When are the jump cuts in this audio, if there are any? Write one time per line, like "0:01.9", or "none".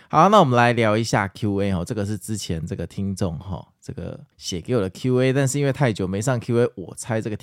0:04.3

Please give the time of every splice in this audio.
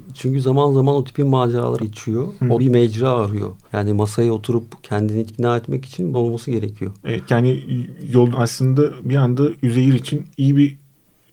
0:01.8
0:02.6
0:03.6
0:05.3
0:06.1
0:07.3
0:08.3
0:10.3

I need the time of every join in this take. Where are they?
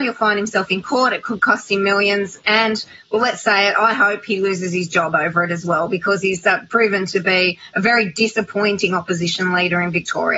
none

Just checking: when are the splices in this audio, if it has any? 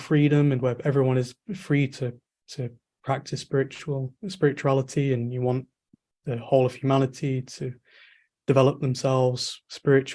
none

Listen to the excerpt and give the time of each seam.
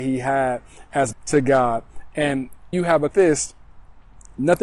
0:01.1
0:02.7
0:03.1

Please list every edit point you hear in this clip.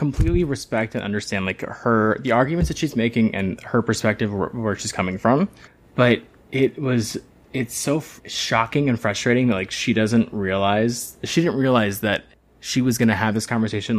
0:05.7
0:07.3
0:08.2
0:12.3

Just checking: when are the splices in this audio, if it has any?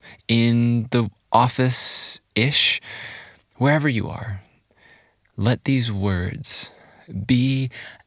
none

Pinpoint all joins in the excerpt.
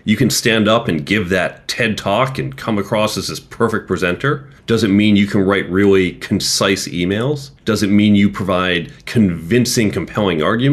0:04.6
0:07.6

